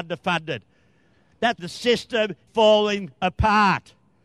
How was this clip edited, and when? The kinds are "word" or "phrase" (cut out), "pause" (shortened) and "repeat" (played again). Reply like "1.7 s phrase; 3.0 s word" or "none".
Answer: 1.6 s word; 2.5 s word